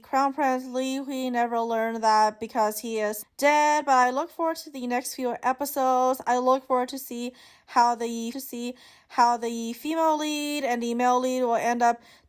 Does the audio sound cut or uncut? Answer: cut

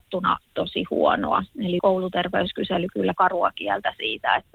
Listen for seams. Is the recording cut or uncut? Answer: cut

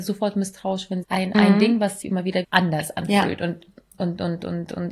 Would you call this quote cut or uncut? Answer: cut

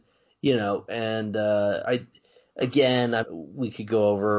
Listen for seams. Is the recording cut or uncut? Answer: cut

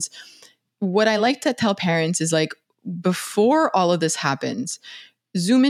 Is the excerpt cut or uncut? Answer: uncut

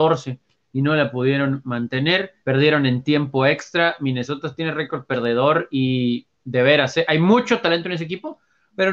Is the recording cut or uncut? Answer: cut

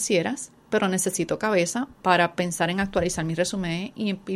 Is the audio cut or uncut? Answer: cut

